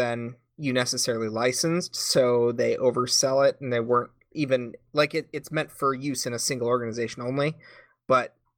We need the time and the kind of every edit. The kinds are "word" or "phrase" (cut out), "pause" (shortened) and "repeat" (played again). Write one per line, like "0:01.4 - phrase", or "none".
none